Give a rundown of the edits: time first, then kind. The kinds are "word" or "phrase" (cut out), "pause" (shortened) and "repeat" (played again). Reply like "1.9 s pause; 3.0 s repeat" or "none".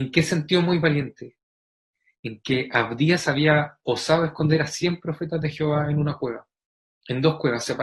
none